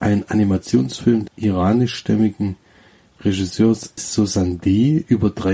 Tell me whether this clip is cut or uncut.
cut